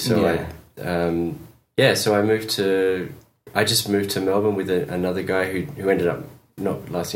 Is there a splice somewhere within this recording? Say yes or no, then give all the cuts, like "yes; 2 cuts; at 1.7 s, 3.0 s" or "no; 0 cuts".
no; 0 cuts